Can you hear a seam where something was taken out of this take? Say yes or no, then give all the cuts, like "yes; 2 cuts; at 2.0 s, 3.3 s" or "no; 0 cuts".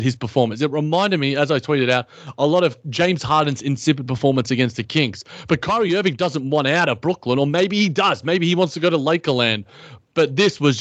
no; 0 cuts